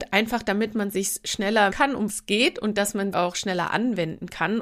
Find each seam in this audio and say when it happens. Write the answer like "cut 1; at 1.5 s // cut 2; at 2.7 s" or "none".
cut 1; at 1.7 s // cut 2; at 2.1 s // cut 3; at 3.1 s